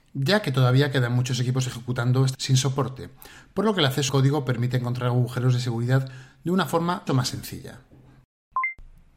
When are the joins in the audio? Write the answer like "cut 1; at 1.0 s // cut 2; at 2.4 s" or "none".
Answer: cut 1; at 2.3 s // cut 2; at 4.1 s // cut 3; at 7.1 s

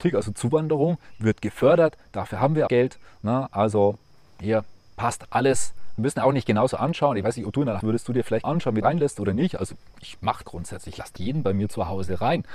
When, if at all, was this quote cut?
cut 1; at 2.7 s // cut 2; at 6.0 s // cut 3; at 7.8 s // cut 4; at 8.4 s // cut 5; at 8.8 s // cut 6; at 10.4 s // cut 7; at 11.2 s

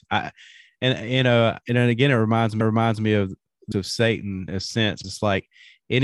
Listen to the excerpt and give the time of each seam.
cut 1; at 1.6 s // cut 2; at 2.6 s // cut 3; at 3.7 s // cut 4; at 4.5 s // cut 5; at 5.0 s

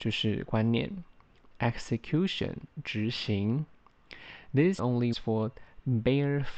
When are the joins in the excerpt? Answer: cut 1; at 4.8 s // cut 2; at 5.1 s

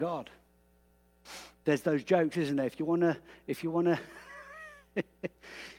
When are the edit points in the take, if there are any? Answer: cut 1; at 1.6 s

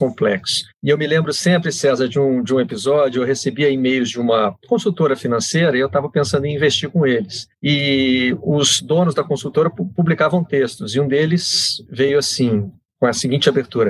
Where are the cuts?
none

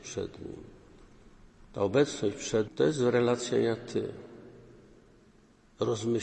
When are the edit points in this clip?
cut 1; at 2.7 s

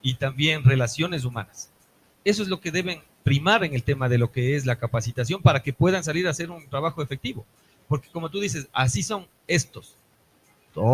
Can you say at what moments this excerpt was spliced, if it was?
none

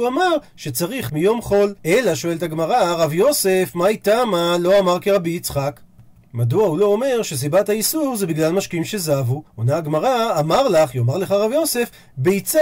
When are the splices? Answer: cut 1; at 1.1 s // cut 2; at 1.8 s // cut 3; at 9.5 s

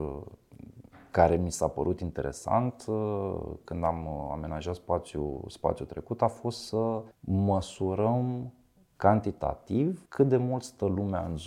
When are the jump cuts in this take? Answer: cut 1; at 7.1 s // cut 2; at 10.1 s

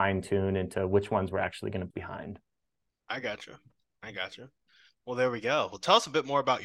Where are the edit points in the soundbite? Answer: cut 1; at 1.9 s

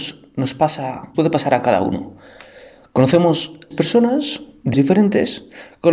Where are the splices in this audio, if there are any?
cut 1; at 1.1 s // cut 2; at 3.7 s // cut 3; at 4.7 s

